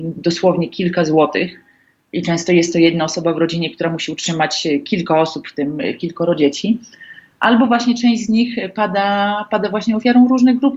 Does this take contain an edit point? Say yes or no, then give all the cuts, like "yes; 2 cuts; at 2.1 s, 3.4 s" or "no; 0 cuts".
no; 0 cuts